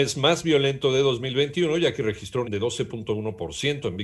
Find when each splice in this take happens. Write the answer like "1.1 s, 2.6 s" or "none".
2.4 s